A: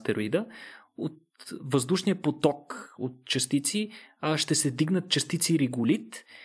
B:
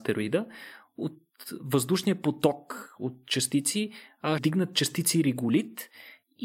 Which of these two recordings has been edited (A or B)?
B